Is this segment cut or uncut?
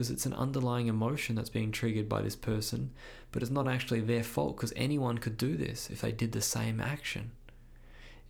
uncut